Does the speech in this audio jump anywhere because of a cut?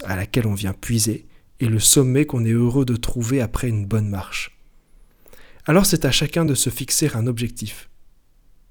no; 0 cuts

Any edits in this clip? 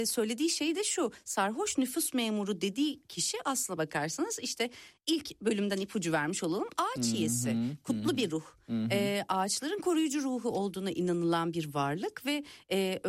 no; 0 cuts

